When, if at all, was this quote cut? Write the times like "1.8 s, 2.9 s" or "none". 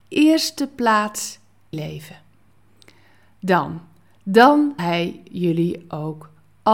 1.7 s, 4.8 s